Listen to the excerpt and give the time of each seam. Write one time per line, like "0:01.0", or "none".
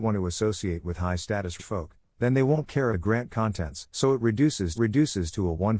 0:01.6
0:02.9
0:03.9
0:04.7